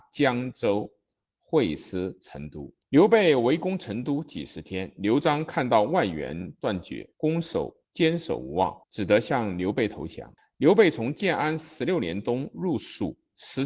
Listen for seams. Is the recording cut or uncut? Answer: cut